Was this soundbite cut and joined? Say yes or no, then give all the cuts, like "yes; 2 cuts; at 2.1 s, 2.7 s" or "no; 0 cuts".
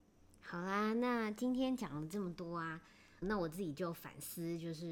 yes; 1 cut; at 3.2 s